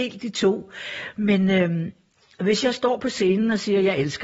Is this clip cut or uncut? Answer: uncut